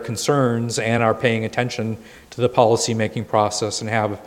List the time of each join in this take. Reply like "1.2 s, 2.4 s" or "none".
none